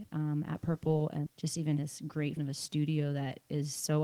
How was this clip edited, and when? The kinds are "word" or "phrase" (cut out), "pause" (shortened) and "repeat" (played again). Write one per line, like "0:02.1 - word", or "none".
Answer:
0:01.3 - word
0:01.8 - word
0:02.4 - word